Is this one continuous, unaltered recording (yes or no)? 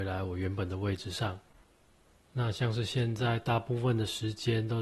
yes